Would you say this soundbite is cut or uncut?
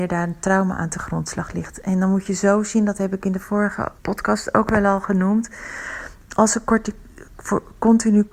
cut